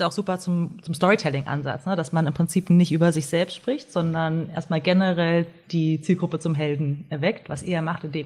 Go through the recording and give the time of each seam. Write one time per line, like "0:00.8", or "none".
none